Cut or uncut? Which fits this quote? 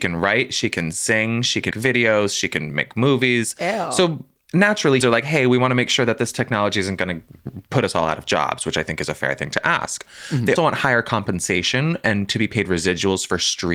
cut